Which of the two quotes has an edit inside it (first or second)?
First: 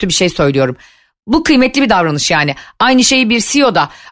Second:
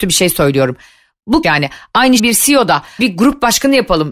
second